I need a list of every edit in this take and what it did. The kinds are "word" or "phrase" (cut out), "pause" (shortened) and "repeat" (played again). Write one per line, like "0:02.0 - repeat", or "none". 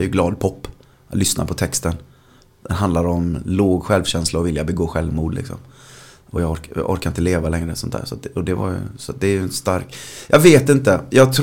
none